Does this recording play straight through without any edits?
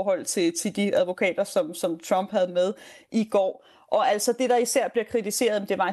yes; 0 cuts

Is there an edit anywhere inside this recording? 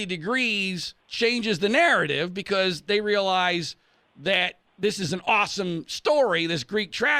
yes; 2 cuts; at 1.0 s, 4.7 s

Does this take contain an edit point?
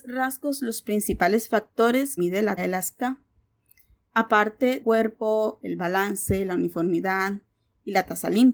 yes; 3 cuts; at 2.2 s, 2.6 s, 4.8 s

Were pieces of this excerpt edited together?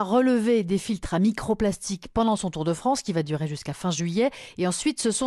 no; 0 cuts

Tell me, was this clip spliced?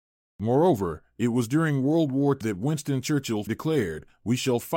yes; 2 cuts; at 2.4 s, 3.5 s

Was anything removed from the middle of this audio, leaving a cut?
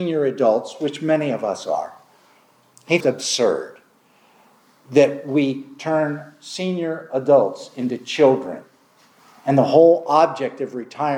yes; 1 cut; at 3.0 s

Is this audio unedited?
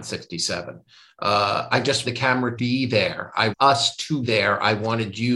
no; 5 cuts; at 1.7 s, 2.0 s, 2.6 s, 3.5 s, 4.2 s

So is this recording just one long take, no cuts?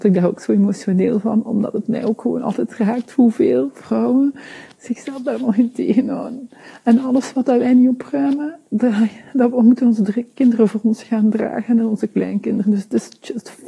yes; 0 cuts

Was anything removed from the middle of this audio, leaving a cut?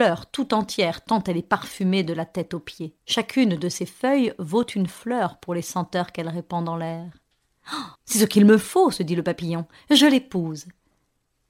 yes; 2 cuts; at 3.0 s, 8.0 s

